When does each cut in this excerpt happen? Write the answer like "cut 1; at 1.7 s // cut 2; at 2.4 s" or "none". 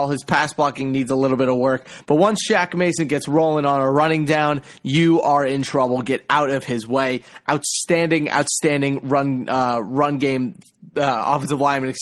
none